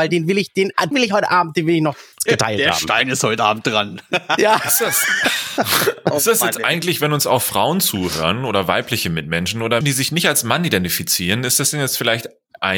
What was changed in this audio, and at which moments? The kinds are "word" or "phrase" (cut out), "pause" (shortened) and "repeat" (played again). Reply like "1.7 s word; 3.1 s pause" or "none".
0.9 s word; 2.3 s word; 9.8 s word